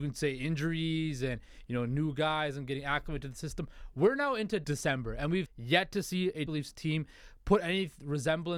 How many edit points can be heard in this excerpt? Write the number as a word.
three